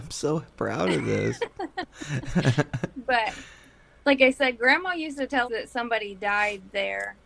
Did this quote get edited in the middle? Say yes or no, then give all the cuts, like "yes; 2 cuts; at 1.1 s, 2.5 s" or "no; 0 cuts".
yes; 1 cut; at 5.4 s